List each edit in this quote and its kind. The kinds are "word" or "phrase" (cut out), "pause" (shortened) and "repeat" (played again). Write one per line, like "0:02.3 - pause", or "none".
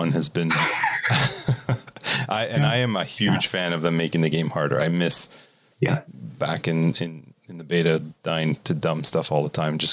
none